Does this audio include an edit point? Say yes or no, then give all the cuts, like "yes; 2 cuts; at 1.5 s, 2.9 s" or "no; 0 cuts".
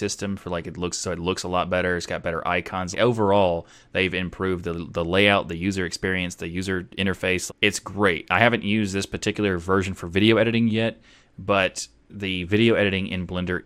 yes; 2 cuts; at 2.9 s, 7.5 s